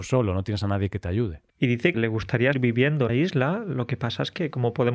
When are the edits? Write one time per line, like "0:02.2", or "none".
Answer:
0:01.5
0:01.9
0:02.5
0:03.1